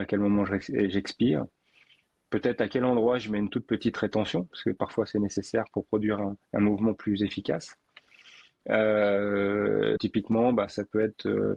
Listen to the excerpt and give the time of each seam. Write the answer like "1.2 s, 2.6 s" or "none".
6.4 s, 10.0 s